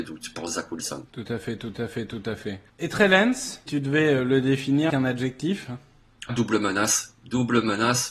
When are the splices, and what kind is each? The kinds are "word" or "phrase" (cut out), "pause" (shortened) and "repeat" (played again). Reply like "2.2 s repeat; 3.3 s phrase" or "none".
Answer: 1.1 s pause; 1.7 s repeat; 2.7 s pause; 3.7 s word; 4.9 s word; 6.3 s word